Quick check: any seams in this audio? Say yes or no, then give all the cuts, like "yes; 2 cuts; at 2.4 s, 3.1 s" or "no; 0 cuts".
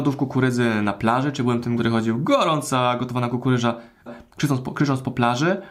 yes; 2 cuts; at 1.8 s, 4.1 s